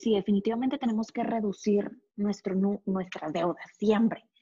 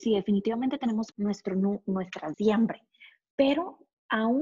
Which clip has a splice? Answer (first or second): second